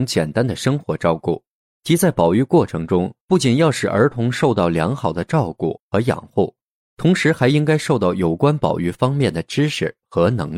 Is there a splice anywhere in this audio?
yes; 1 cut; at 3.2 s

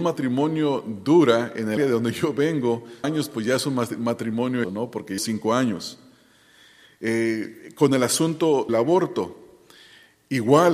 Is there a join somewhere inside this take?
yes; 5 cuts; at 1.8 s, 3.0 s, 4.6 s, 5.2 s, 8.7 s

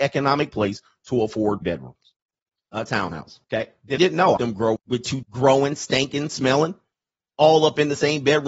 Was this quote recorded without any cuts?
no; 7 cuts; at 1.6 s, 2.2 s, 3.4 s, 4.0 s, 4.4 s, 4.8 s, 5.2 s

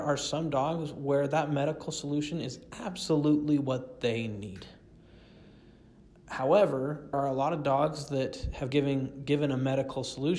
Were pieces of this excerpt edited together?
yes; 2 cuts; at 7.1 s, 8.7 s

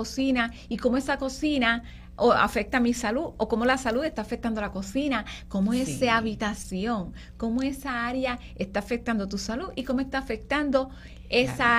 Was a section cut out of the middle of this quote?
no; 0 cuts

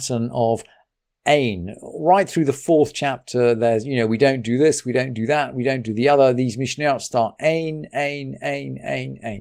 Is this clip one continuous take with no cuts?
yes; 0 cuts

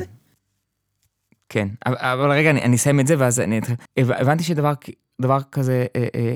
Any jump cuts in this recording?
yes; 1 cut; at 3.9 s

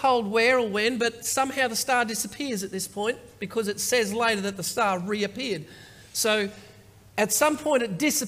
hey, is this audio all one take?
yes; 0 cuts

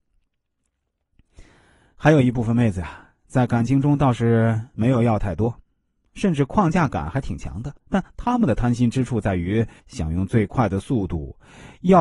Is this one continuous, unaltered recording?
no; 2 cuts; at 7.8 s, 9.8 s

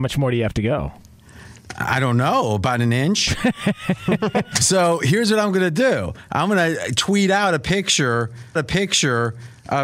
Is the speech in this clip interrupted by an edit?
yes; 1 cut; at 8.6 s

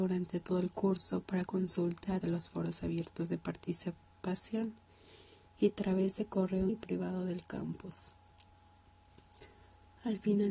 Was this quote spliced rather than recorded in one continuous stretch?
yes; 3 cuts; at 1.5 s, 2.2 s, 6.7 s

